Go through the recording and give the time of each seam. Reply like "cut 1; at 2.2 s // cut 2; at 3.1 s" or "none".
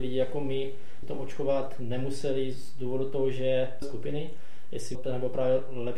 cut 1; at 1.0 s // cut 2; at 3.8 s // cut 3; at 4.9 s